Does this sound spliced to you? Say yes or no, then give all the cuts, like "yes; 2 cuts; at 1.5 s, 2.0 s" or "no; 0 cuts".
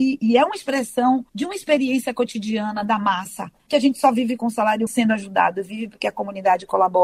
yes; 2 cuts; at 1.3 s, 4.9 s